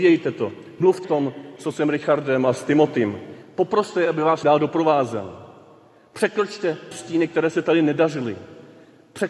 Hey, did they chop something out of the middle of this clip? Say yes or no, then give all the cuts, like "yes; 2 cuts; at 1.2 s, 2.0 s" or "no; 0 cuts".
yes; 3 cuts; at 1.0 s, 4.4 s, 6.9 s